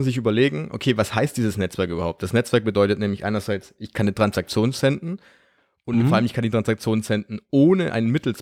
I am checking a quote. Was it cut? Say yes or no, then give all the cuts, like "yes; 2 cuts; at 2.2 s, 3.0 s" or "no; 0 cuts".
no; 0 cuts